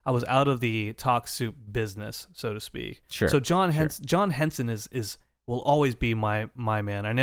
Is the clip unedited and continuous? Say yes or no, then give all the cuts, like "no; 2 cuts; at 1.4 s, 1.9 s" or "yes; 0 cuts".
yes; 0 cuts